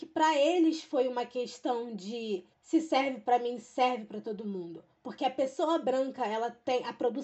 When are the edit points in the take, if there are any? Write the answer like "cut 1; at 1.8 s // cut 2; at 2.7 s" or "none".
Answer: cut 1; at 2.5 s